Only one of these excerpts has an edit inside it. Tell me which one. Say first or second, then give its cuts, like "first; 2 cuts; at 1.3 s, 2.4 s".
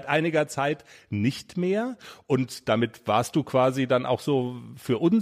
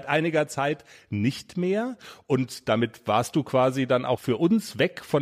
second; 1 cut; at 4.2 s